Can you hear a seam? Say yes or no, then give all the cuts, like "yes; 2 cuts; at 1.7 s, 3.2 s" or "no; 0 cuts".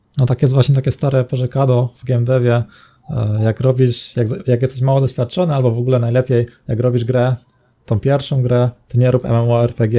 no; 0 cuts